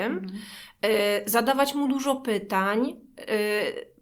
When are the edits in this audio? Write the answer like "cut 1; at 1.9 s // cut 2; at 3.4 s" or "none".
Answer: none